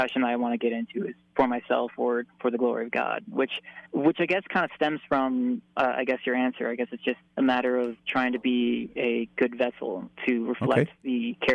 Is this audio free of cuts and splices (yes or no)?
no